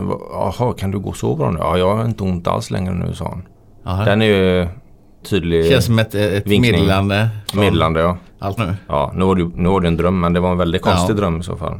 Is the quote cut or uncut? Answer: cut